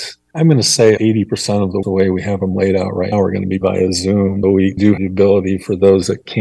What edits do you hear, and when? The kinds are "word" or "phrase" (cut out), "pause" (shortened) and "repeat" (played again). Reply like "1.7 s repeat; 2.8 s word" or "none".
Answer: 1.0 s word; 1.8 s word; 3.1 s word; 3.6 s word; 4.4 s word; 5.0 s word

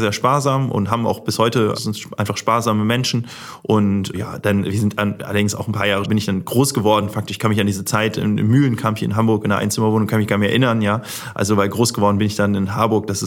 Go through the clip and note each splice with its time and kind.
1.7 s word; 4.1 s word; 6.0 s word

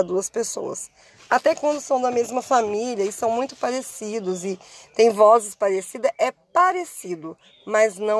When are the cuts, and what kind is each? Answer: none

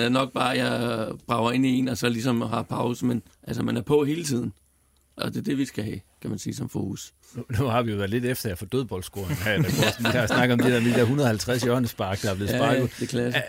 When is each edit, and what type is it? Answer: 3.3 s pause; 5.2 s word; 7.2 s pause

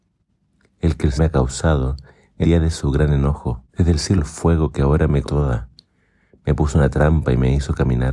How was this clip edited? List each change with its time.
1.2 s word; 2.4 s word; 3.7 s pause; 4.2 s word; 5.2 s word

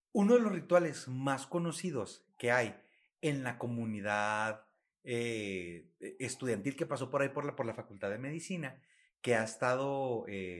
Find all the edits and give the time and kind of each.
none

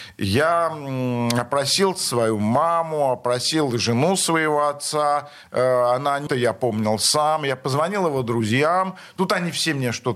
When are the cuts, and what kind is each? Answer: 6.3 s phrase

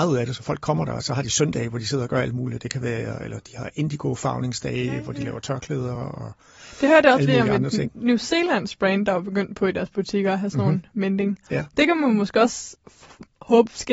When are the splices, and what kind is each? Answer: none

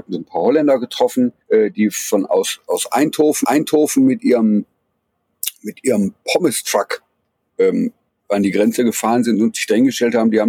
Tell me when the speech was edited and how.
1.4 s pause; 3.4 s repeat; 8.1 s pause

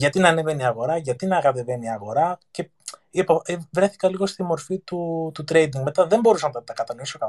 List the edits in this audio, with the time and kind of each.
none

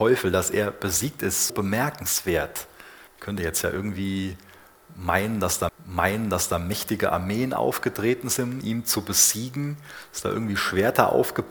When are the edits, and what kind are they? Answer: 1.5 s word; 3.1 s pause; 5.7 s repeat; 8.6 s word

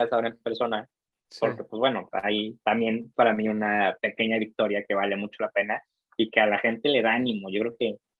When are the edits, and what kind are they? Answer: 3.1 s word

